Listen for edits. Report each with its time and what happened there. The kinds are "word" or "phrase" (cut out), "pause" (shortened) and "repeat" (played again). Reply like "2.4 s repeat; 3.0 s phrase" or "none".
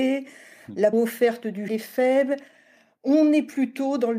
0.9 s word; 1.7 s word